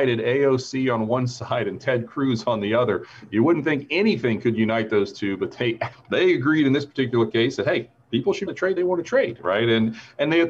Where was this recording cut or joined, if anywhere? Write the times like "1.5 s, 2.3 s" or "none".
5.9 s, 8.5 s, 8.8 s

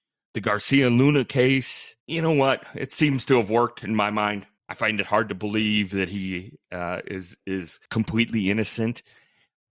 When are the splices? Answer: 2.0 s, 4.6 s, 7.9 s

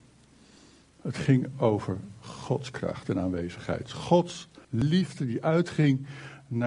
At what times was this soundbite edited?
4.6 s

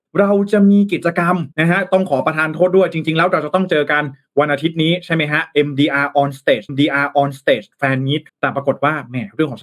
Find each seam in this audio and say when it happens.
1.5 s, 6.7 s, 8.3 s

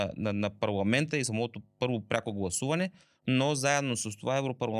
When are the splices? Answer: none

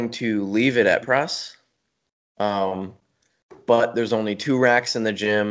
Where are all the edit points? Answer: 1.0 s

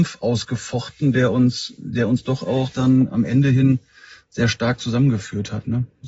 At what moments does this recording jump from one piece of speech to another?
none

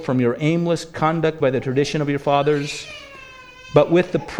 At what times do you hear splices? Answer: 1.4 s

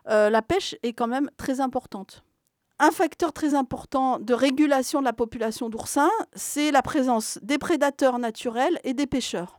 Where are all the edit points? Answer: none

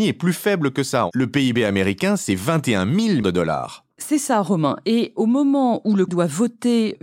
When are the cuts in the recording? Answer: 3.2 s, 6.1 s

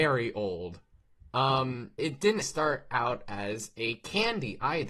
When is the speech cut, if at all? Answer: 2.0 s, 2.4 s

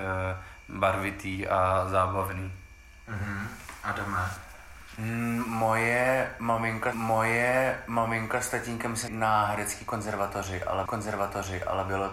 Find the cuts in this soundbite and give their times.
6.9 s, 9.1 s, 10.9 s

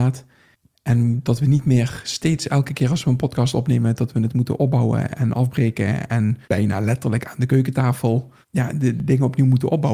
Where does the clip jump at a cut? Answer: 6.4 s, 8.4 s

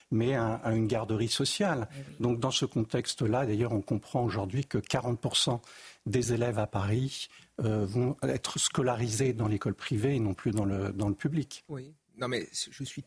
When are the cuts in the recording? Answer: none

